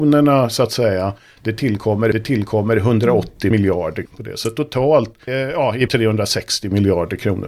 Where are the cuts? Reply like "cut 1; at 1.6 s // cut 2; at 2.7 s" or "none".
cut 1; at 2.1 s // cut 2; at 5.3 s // cut 3; at 5.9 s